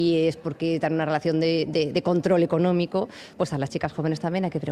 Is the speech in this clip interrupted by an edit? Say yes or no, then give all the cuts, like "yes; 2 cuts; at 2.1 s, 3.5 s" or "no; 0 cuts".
no; 0 cuts